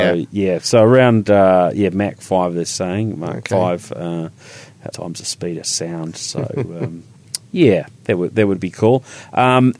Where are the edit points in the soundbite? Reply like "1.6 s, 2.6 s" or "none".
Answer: 4.9 s